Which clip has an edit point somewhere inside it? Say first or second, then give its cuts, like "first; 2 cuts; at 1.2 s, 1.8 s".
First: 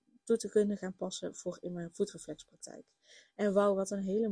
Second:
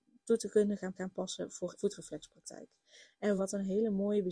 second; 3 cuts; at 1.0 s, 1.7 s, 3.4 s